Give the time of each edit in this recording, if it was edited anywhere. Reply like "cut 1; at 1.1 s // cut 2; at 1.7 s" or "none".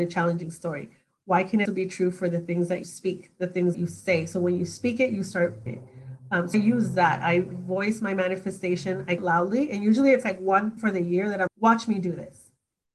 cut 1; at 1.6 s // cut 2; at 2.8 s // cut 3; at 3.7 s // cut 4; at 5.7 s // cut 5; at 6.5 s // cut 6; at 7.5 s // cut 7; at 9.2 s // cut 8; at 10.8 s // cut 9; at 11.5 s